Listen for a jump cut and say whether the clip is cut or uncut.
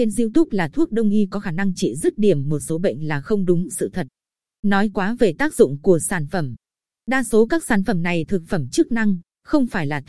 cut